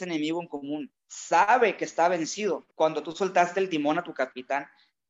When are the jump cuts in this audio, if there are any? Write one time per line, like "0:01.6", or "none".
0:01.0
0:02.7